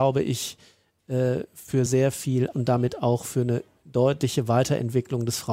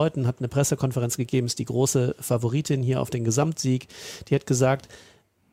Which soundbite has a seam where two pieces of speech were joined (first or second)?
first